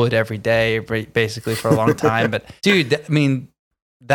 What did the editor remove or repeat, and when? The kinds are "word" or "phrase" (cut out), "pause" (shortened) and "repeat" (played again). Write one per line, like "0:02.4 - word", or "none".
0:02.6 - pause